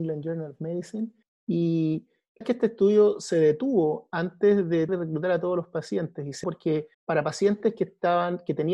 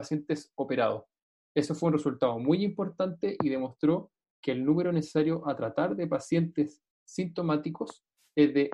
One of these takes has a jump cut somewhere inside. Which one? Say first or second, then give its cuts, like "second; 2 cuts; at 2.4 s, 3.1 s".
first; 5 cuts; at 1.2 s, 2.4 s, 4.9 s, 6.4 s, 6.9 s